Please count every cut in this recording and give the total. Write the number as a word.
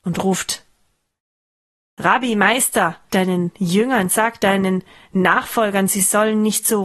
one